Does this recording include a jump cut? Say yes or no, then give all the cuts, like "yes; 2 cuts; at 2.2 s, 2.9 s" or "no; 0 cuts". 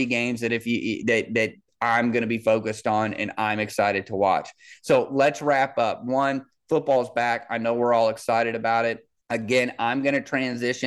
no; 0 cuts